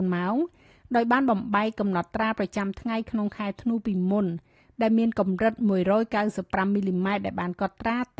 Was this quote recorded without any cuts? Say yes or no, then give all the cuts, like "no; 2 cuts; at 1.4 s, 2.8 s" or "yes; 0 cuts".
yes; 0 cuts